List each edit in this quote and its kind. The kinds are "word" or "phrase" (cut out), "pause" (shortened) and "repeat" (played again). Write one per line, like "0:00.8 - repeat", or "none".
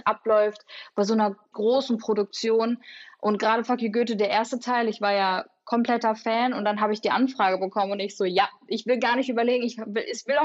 0:01.5 - word